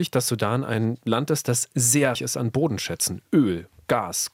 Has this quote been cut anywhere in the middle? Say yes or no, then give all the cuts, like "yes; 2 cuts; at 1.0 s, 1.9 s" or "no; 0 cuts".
yes; 1 cut; at 2.1 s